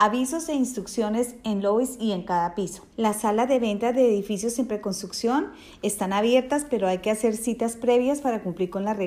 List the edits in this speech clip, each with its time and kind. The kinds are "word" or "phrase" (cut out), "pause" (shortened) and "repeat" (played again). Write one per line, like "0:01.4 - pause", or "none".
0:02.9 - pause